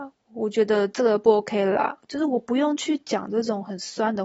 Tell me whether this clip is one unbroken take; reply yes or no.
yes